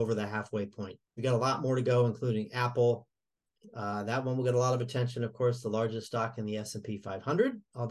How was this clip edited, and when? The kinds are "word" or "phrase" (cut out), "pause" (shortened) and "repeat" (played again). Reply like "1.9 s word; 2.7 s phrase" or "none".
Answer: 1.1 s pause